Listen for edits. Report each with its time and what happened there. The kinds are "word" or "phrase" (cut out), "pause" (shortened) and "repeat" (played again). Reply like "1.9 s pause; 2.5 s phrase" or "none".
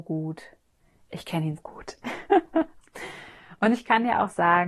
1.6 s word